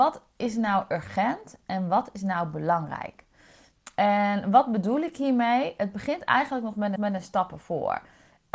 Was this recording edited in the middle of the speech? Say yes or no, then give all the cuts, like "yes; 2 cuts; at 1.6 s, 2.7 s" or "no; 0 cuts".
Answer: yes; 1 cut; at 7.0 s